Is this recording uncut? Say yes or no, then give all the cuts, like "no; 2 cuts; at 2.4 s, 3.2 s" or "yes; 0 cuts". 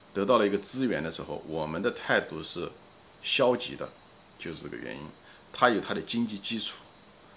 yes; 0 cuts